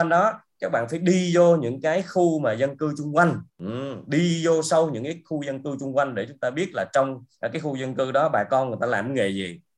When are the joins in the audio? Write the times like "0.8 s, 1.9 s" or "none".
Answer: 3.5 s, 7.3 s